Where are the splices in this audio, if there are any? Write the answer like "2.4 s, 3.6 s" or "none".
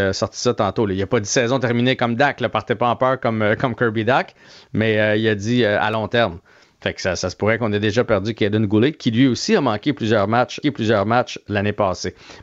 10.6 s